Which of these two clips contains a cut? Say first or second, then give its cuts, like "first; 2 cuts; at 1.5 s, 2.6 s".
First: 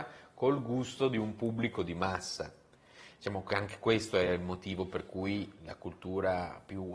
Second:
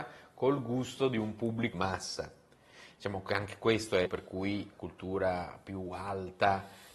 second; 3 cuts; at 1.7 s, 4.1 s, 4.7 s